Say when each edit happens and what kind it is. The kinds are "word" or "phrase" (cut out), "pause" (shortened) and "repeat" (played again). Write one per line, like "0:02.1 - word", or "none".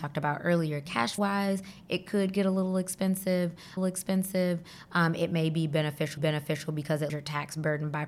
0:01.2 - word
0:03.8 - repeat
0:06.2 - repeat
0:07.1 - word